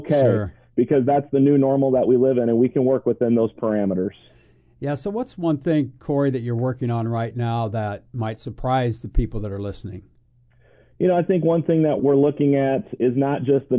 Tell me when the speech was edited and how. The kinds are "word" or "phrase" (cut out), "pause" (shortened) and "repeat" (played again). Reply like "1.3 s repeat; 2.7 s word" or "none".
none